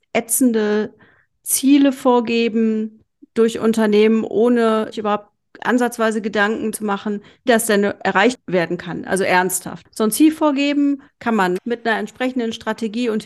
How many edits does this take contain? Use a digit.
4